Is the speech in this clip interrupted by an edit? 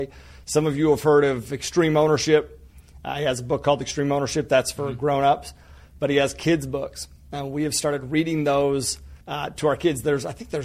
yes; 1 cut; at 9.2 s

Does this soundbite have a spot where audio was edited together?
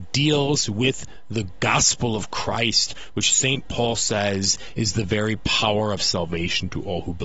no; 0 cuts

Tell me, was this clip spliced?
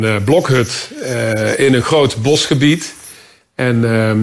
no; 0 cuts

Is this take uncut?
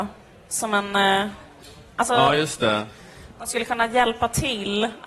yes; 0 cuts

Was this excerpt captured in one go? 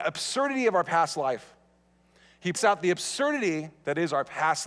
no; 1 cut; at 2.6 s

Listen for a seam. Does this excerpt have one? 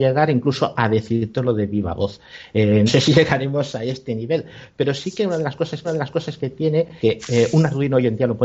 yes; 3 cuts; at 2.9 s, 5.8 s, 7.0 s

